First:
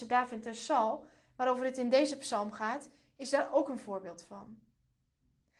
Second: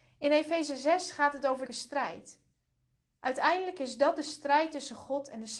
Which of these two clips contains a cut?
second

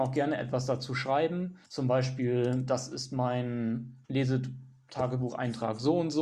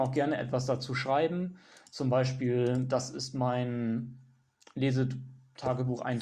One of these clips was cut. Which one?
first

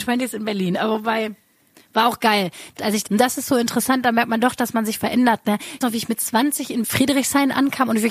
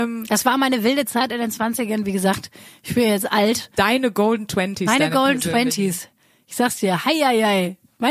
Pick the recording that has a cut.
first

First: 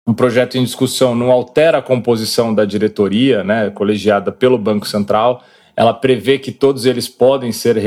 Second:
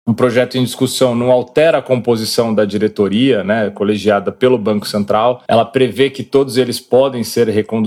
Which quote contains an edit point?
second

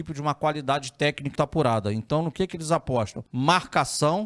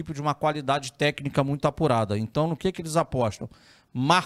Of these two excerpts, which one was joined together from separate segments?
first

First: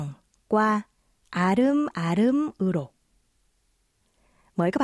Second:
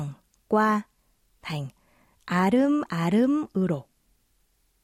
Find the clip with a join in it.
first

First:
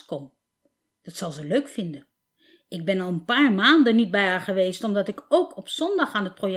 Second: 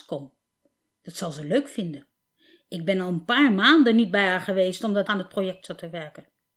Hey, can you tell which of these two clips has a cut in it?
second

